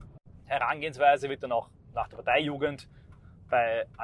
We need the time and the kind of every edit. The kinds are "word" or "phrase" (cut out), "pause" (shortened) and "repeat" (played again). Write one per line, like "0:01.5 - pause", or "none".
none